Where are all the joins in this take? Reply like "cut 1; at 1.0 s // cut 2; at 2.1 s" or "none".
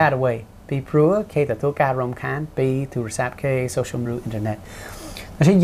cut 1; at 4.1 s

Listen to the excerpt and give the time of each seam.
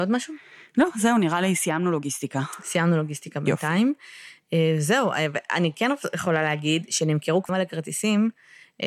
cut 1; at 7.5 s

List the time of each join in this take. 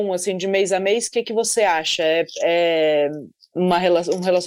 none

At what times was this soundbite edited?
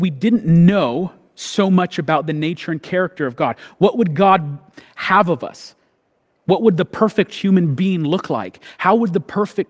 none

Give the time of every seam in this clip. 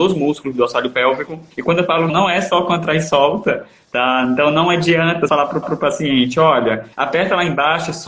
cut 1; at 1.5 s // cut 2; at 2.1 s // cut 3; at 5.3 s // cut 4; at 5.6 s // cut 5; at 6.9 s

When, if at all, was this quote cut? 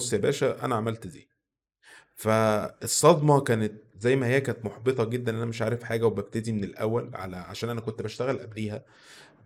none

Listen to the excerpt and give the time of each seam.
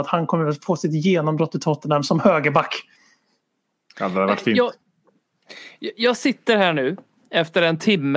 none

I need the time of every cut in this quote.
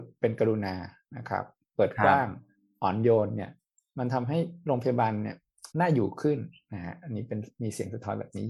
cut 1; at 5.7 s

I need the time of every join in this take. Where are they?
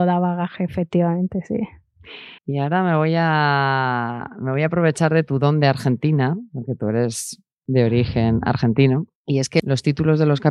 cut 1; at 2.4 s // cut 2; at 9.2 s

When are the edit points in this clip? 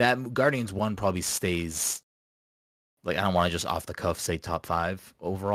none

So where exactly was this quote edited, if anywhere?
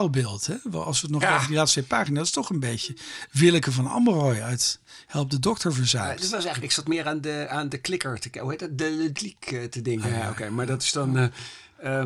cut 1; at 1.2 s // cut 2; at 6.6 s // cut 3; at 9.1 s // cut 4; at 10.0 s

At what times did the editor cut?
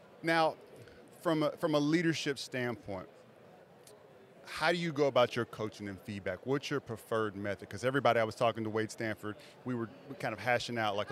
none

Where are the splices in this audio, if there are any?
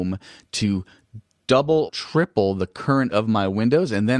cut 1; at 1.9 s // cut 2; at 3.1 s

